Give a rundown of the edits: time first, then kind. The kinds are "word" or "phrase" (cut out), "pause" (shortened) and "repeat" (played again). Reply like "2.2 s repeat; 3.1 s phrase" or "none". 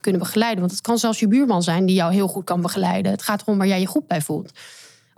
none